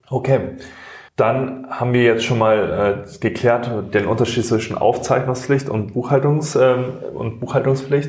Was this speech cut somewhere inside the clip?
yes; 1 cut; at 1.1 s

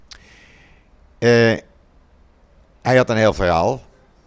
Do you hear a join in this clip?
no; 0 cuts

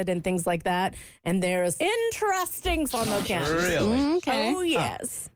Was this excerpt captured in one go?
no; 3 cuts; at 1.8 s, 2.9 s, 3.2 s

